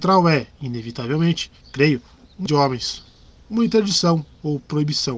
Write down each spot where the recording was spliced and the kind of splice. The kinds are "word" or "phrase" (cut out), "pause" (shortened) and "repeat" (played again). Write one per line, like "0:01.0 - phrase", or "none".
0:01.6 - pause
0:02.5 - word

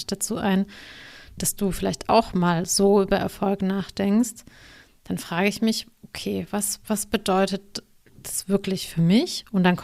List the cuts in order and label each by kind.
none

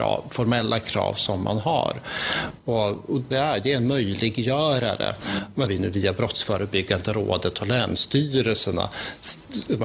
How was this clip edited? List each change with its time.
0:03.3 - phrase
0:05.7 - phrase

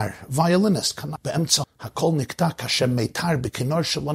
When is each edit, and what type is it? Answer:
0:01.2 - word
0:01.6 - word

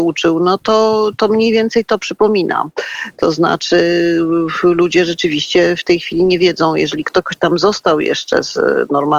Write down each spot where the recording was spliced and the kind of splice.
0:01.2 - word

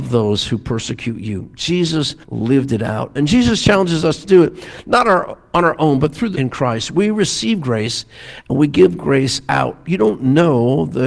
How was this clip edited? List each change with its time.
0:02.2 - pause
0:06.3 - phrase

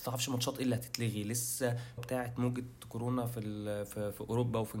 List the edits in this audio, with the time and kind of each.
0:02.0 - word

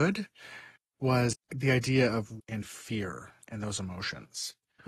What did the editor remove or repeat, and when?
0:01.3 - word
0:02.4 - word

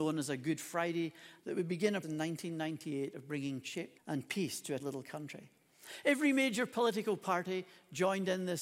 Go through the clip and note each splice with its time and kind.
0:01.4 - word
0:02.0 - word
0:04.0 - word
0:04.8 - word

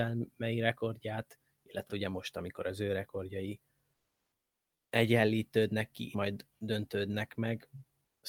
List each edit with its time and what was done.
0:01.9 - word
0:06.1 - word

